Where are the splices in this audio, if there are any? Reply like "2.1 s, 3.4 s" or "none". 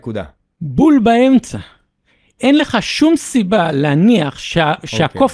none